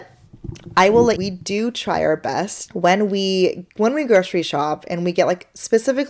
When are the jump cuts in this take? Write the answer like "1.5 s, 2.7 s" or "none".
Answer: 1.2 s, 3.7 s